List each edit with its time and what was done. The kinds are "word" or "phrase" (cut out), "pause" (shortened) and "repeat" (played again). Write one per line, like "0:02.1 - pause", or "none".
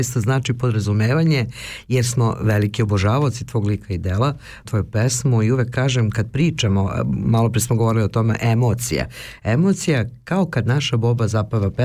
0:04.6 - word